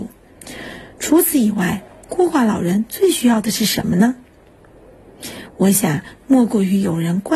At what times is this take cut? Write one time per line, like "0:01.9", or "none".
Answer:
0:00.9